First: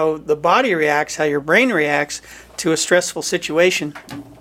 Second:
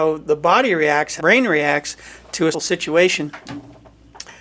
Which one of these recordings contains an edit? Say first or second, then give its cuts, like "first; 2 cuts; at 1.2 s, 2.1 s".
second; 2 cuts; at 1.2 s, 2.5 s